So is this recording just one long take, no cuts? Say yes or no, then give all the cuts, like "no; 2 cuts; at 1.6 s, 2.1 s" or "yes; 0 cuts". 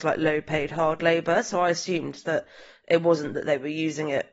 yes; 0 cuts